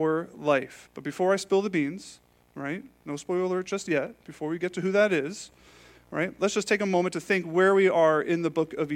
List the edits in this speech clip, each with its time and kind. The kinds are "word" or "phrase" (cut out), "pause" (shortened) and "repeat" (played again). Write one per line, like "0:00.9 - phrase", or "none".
none